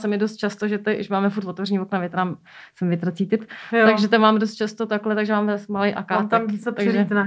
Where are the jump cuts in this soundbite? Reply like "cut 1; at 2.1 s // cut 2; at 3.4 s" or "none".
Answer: none